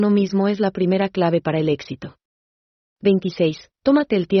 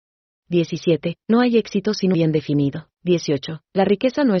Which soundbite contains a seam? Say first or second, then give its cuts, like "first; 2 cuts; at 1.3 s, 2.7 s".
second; 2 cuts; at 2.1 s, 2.9 s